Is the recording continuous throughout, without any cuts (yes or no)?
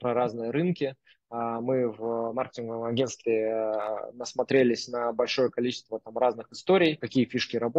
yes